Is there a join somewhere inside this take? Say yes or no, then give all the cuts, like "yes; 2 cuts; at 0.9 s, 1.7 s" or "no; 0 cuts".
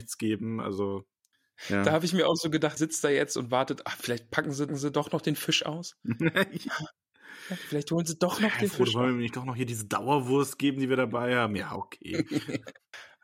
yes; 2 cuts; at 2.8 s, 4.7 s